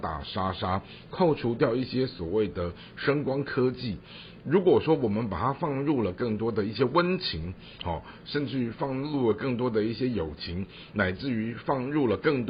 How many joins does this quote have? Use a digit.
0